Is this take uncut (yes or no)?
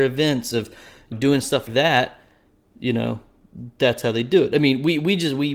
no